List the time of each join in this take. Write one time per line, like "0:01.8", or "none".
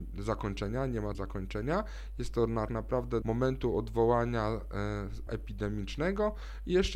0:01.1
0:02.7
0:03.2
0:05.3